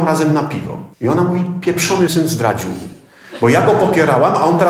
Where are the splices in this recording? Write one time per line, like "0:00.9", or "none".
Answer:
0:00.9
0:02.1